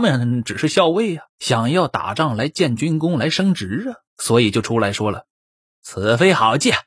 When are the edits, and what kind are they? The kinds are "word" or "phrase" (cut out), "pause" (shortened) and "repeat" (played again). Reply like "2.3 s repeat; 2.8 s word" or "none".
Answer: 1.3 s pause; 4.1 s pause; 5.3 s pause